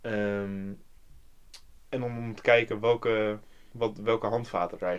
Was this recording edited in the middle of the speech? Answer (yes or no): no